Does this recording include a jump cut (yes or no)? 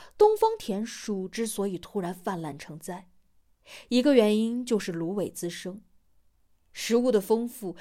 no